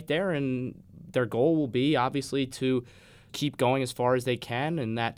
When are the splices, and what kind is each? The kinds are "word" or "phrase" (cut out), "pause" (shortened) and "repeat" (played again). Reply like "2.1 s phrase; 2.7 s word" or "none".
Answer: 3.3 s word